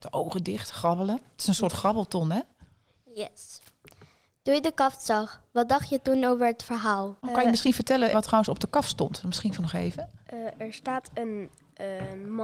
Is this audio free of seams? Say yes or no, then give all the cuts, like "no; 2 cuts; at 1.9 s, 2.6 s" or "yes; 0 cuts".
no; 3 cuts; at 7.2 s, 8.1 s, 9.6 s